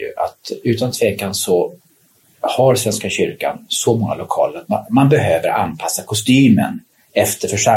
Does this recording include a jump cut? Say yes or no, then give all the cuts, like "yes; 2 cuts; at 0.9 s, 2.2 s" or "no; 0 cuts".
no; 0 cuts